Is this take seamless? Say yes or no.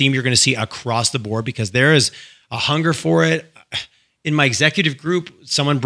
yes